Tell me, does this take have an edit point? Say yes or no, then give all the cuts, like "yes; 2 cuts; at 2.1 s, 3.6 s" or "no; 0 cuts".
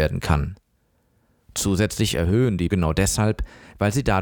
yes; 1 cut; at 2.7 s